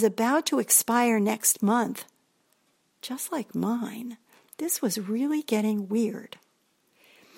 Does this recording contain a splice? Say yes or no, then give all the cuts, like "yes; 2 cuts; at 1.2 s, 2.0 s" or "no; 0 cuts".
no; 0 cuts